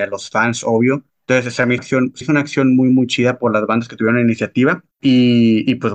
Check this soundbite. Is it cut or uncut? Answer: cut